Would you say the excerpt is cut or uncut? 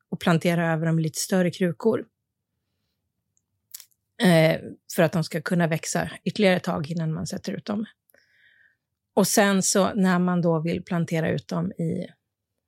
uncut